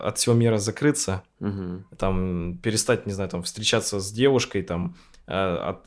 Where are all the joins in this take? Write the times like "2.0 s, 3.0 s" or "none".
none

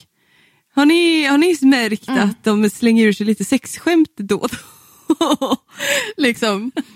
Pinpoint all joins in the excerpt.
none

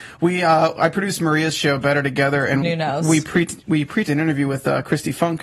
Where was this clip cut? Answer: 2.6 s, 4.0 s

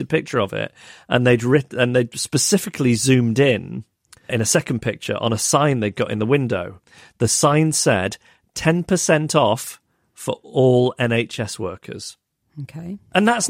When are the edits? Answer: 4.3 s

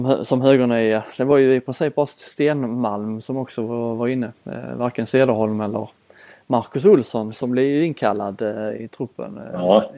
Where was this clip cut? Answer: none

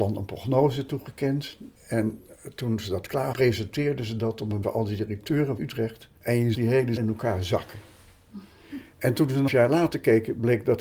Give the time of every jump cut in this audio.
1.8 s, 3.3 s, 4.6 s, 5.6 s, 6.2 s, 6.5 s, 7.0 s, 9.5 s

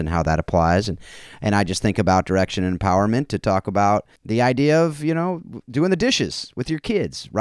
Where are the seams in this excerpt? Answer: 4.2 s

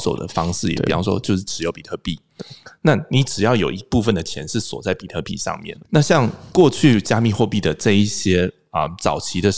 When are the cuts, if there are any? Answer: 5.8 s

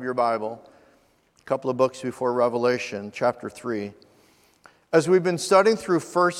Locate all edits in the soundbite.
none

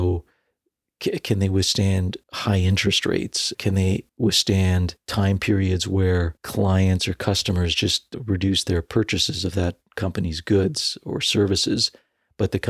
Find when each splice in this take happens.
2.2 s, 4.1 s

